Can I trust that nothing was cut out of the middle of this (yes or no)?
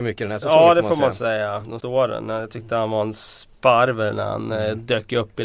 no